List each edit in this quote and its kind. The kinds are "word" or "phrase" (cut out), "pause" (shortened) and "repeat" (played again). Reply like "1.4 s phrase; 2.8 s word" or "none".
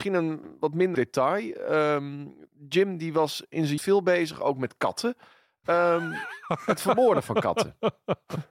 0.9 s word; 3.8 s word